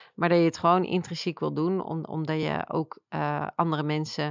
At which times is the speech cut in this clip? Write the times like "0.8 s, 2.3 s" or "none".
none